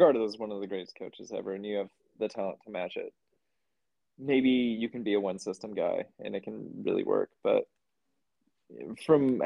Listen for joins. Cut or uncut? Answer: uncut